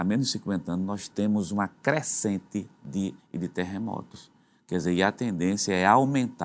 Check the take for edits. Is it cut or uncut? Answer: cut